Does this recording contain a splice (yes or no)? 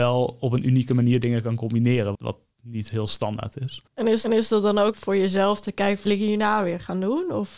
yes